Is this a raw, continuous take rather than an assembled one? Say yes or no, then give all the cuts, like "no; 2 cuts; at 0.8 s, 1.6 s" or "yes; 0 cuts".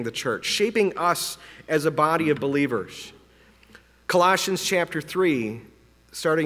yes; 0 cuts